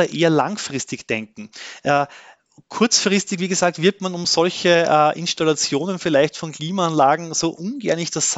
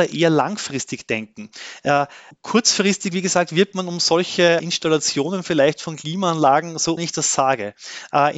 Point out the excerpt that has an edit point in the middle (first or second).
second